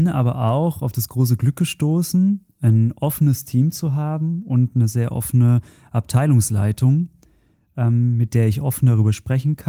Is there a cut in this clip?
no; 0 cuts

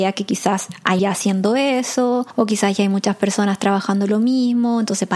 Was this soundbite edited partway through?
yes; 1 cut; at 1.0 s

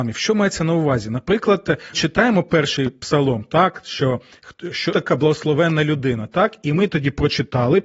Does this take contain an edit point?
yes; 2 cuts; at 1.9 s, 4.9 s

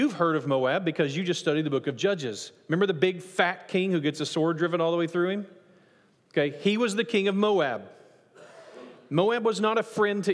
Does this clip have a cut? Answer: no; 0 cuts

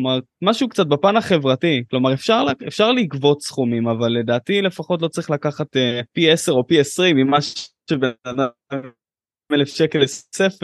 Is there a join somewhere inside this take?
yes; 2 cuts; at 6.1 s, 8.2 s

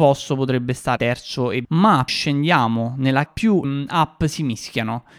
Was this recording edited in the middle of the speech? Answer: yes; 5 cuts; at 1.0 s, 1.6 s, 2.1 s, 3.3 s, 3.6 s

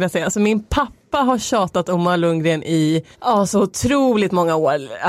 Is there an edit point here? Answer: yes; 1 cut; at 3.1 s

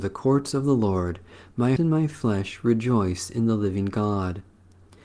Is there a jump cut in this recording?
yes; 1 cut; at 1.8 s

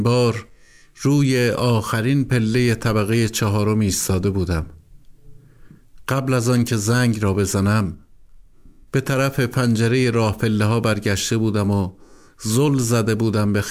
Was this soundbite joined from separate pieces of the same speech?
no; 0 cuts

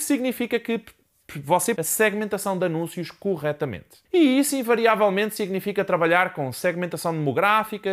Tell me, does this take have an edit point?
yes; 2 cuts; at 1.8 s, 4.0 s

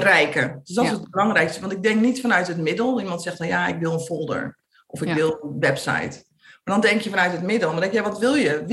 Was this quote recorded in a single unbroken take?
yes; 0 cuts

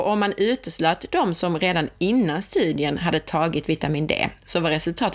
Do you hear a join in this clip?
no; 0 cuts

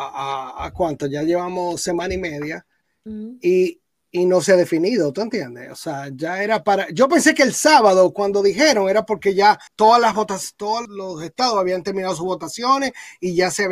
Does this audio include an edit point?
yes; 2 cuts; at 9.7 s, 10.8 s

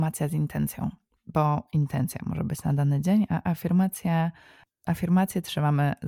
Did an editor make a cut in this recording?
no; 0 cuts

